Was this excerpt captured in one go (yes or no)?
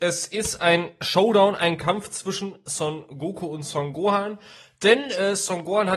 yes